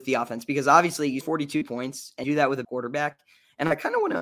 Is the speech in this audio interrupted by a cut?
yes; 3 cuts; at 1.2 s, 2.2 s, 2.6 s

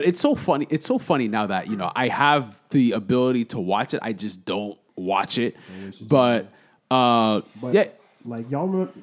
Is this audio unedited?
no; 1 cut; at 4.9 s

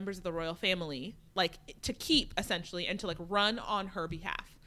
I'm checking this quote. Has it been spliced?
no; 0 cuts

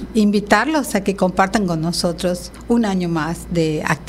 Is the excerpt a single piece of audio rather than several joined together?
yes; 0 cuts

